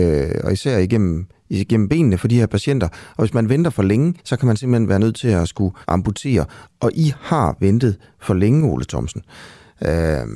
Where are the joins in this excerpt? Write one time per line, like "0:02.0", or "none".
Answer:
0:04.2
0:05.8